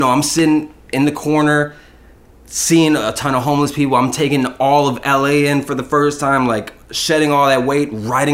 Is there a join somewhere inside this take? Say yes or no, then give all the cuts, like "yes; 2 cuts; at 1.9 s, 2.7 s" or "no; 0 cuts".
no; 0 cuts